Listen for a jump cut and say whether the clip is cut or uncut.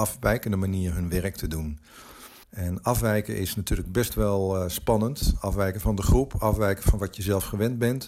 cut